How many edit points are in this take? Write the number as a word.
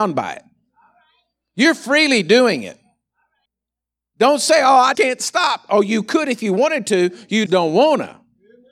two